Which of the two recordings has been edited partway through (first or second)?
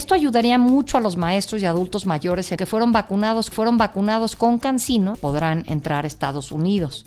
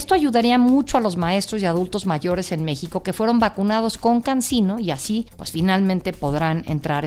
first